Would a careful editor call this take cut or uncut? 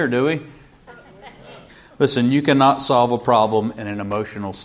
cut